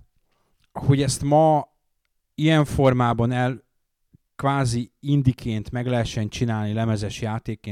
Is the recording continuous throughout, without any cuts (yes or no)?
yes